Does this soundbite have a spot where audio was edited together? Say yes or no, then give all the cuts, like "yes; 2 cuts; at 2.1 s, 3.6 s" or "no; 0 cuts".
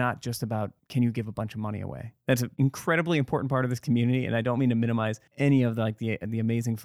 yes; 1 cut; at 2.5 s